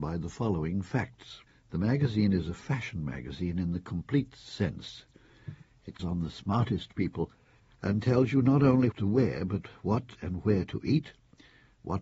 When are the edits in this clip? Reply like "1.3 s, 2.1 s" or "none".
1.5 s, 6.0 s, 7.6 s, 8.9 s